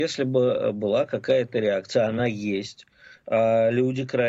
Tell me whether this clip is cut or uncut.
uncut